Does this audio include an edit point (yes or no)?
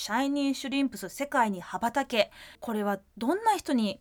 yes